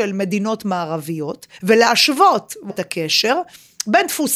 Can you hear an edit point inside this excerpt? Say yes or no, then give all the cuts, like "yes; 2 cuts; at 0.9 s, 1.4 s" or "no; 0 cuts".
yes; 2 cuts; at 1.6 s, 2.7 s